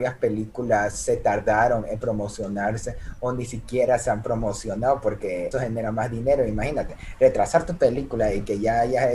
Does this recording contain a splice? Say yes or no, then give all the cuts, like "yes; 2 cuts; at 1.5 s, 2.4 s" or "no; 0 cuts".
yes; 1 cut; at 5.5 s